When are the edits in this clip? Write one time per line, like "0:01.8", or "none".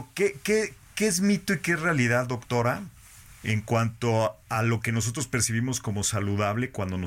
none